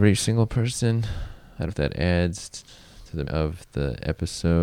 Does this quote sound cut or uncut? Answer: cut